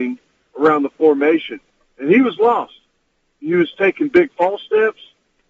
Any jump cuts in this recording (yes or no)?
no